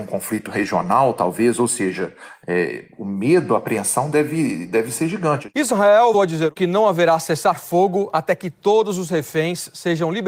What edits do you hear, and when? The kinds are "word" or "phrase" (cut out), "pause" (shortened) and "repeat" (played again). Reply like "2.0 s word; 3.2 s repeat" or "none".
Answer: 6.1 s word